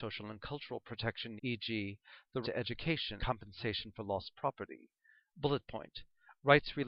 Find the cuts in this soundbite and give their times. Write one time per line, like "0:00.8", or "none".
0:01.4
0:02.4
0:03.2